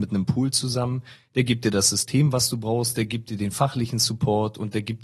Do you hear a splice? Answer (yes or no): no